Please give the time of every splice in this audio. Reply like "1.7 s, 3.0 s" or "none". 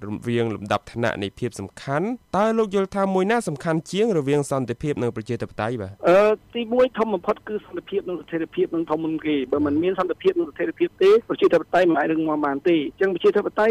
6.0 s